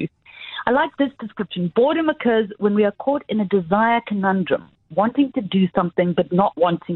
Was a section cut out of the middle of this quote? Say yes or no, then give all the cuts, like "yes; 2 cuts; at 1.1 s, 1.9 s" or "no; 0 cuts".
no; 0 cuts